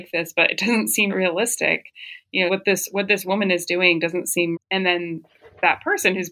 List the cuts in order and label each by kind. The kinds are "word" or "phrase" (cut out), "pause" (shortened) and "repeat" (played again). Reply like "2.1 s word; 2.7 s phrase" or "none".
1.1 s word; 2.5 s word; 4.5 s word